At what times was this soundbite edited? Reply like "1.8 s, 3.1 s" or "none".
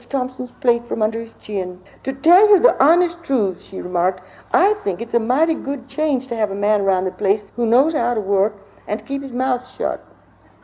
1.9 s, 7.5 s